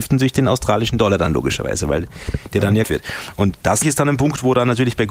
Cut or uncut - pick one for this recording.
cut